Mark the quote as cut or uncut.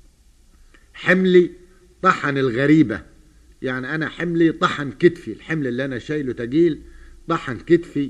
uncut